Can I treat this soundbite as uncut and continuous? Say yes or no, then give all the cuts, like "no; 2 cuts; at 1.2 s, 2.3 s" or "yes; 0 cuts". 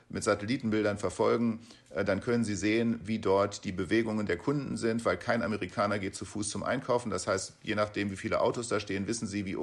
yes; 0 cuts